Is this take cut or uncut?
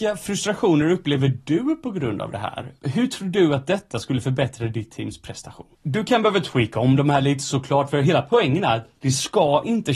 uncut